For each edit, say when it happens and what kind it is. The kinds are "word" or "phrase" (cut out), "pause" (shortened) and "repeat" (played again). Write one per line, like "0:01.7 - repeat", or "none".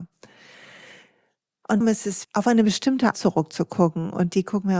0:01.8 - word
0:02.2 - word
0:03.1 - word